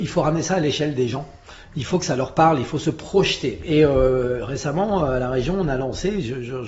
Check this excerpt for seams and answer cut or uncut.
uncut